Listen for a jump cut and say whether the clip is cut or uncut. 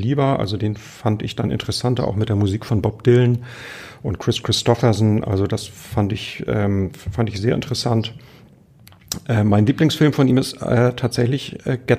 uncut